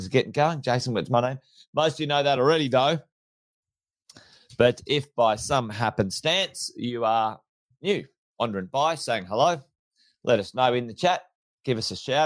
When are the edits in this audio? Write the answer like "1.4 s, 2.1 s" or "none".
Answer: none

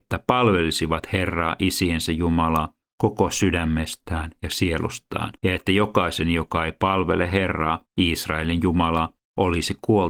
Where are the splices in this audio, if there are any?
5.4 s

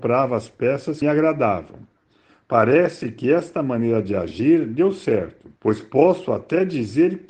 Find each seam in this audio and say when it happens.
1.0 s, 5.6 s

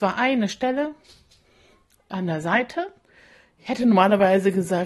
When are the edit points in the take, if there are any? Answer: none

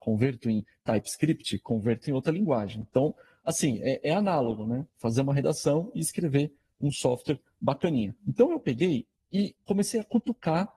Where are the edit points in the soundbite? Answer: 8.2 s

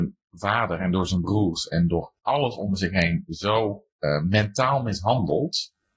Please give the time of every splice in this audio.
2.2 s, 3.9 s

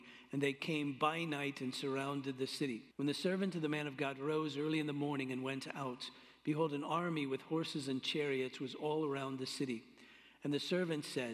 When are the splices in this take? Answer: 2.9 s

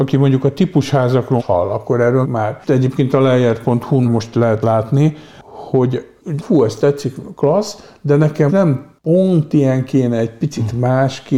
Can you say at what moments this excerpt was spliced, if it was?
1.4 s, 2.2 s, 4.0 s, 4.6 s, 6.4 s, 8.5 s

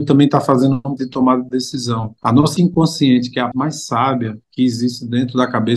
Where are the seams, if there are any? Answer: 1.0 s, 2.2 s, 2.6 s, 3.5 s, 4.4 s

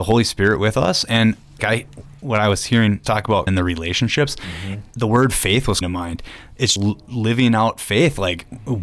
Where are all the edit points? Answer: 1.6 s, 3.0 s, 3.5 s, 5.8 s, 6.8 s

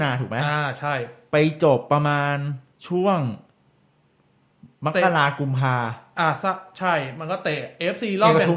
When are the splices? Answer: 2.7 s

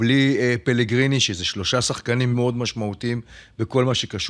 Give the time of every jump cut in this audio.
2.3 s

